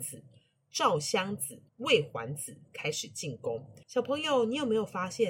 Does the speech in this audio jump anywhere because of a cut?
yes; 2 cuts; at 1.7 s, 3.8 s

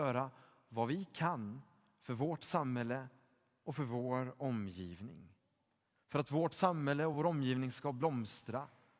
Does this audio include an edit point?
no; 0 cuts

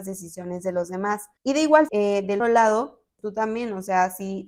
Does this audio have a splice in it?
yes; 3 cuts; at 1.4 s, 1.9 s, 2.4 s

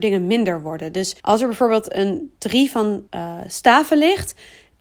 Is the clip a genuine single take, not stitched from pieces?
no; 3 cuts; at 1.2 s, 2.4 s, 3.1 s

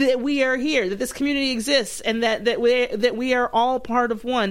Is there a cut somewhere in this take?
no; 0 cuts

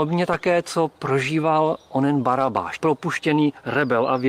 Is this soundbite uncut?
no; 1 cut; at 2.8 s

